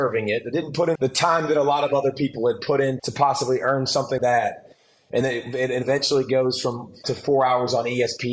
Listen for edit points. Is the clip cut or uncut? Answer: cut